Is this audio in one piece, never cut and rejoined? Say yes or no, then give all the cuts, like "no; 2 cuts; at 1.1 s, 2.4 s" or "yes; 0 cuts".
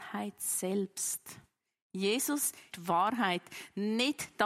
no; 1 cut; at 2.7 s